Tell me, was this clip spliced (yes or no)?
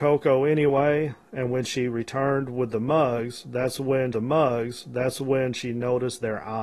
yes